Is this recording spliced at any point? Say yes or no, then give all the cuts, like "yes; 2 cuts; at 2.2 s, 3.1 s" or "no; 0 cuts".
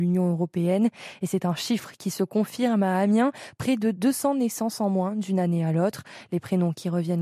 no; 0 cuts